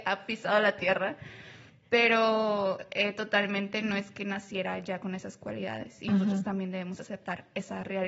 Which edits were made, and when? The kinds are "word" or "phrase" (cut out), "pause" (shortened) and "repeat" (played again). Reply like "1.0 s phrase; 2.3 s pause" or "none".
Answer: none

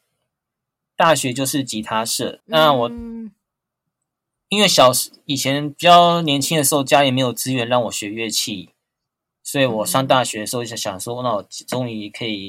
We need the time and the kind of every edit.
2.4 s word

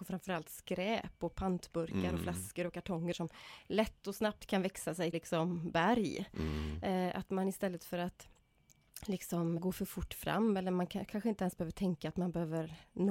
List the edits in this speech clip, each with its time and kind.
3.1 s phrase; 5.1 s word; 9.6 s word

